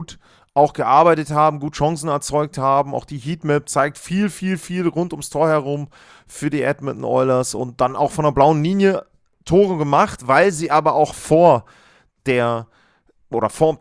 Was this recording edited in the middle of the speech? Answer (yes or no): no